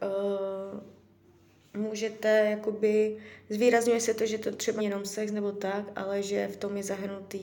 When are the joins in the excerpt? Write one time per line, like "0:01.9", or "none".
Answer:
0:04.8